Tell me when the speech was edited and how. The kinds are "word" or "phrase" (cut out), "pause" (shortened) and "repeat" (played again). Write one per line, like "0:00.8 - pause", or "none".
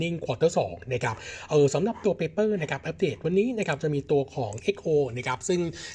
none